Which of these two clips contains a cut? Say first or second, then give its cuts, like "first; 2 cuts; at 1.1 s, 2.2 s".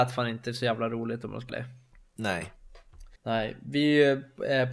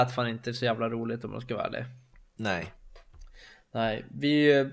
first; 2 cuts; at 1.5 s, 3.2 s